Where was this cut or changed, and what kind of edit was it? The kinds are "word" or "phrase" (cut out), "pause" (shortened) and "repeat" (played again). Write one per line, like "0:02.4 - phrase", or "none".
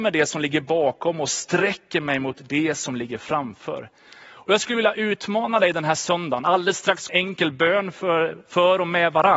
0:07.1 - phrase